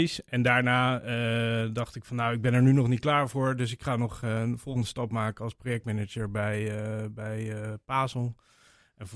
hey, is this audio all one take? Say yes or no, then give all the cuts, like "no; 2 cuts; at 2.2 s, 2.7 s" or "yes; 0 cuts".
yes; 0 cuts